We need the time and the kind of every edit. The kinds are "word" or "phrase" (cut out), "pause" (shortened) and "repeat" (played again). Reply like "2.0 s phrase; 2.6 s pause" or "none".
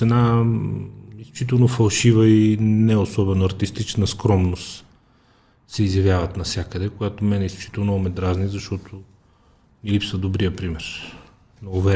none